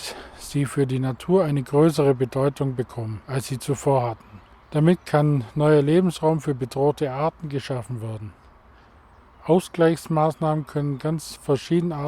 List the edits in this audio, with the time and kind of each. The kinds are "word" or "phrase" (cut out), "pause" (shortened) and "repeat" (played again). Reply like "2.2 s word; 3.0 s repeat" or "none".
3.2 s pause; 4.6 s pause